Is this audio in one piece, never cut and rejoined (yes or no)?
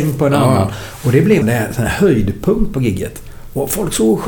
no